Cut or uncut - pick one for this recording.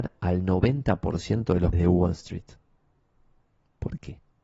cut